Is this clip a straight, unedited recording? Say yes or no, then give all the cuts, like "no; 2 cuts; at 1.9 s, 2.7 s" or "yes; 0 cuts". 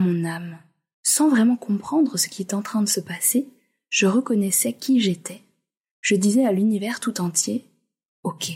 yes; 0 cuts